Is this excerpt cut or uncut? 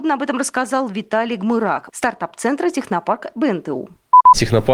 cut